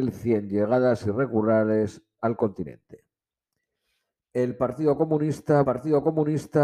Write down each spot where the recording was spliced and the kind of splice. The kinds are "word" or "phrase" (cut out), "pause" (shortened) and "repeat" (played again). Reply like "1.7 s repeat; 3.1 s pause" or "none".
2.2 s word; 5.6 s repeat